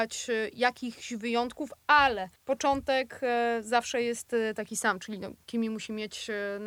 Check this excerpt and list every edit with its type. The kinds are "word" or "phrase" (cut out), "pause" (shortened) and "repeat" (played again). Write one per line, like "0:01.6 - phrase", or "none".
0:02.4 - pause